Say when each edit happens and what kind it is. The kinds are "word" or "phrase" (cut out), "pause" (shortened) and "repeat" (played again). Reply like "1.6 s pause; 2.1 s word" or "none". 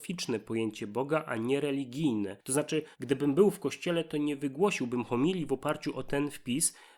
2.9 s pause